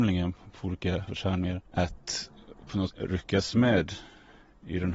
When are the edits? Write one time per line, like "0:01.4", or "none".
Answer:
0:01.1
0:01.7
0:02.9